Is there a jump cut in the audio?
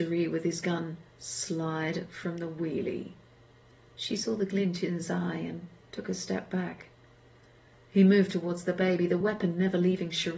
no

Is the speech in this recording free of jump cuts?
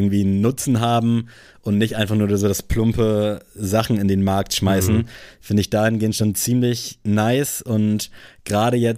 yes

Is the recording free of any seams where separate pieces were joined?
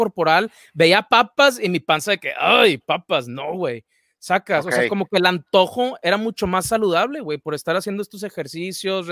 yes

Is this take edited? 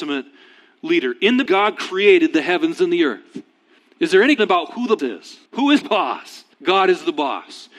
yes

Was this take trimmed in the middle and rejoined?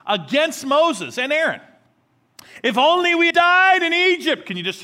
yes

